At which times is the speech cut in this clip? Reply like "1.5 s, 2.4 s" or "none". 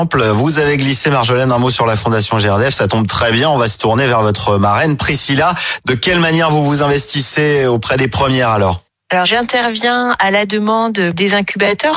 none